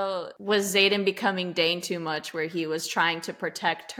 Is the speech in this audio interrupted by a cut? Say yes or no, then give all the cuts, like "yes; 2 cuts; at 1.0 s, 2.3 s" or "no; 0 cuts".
no; 0 cuts